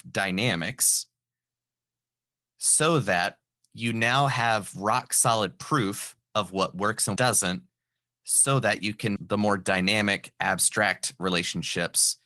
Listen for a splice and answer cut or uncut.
cut